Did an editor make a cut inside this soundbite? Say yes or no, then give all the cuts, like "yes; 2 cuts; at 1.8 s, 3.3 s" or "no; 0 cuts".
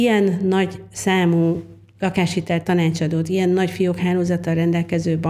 no; 0 cuts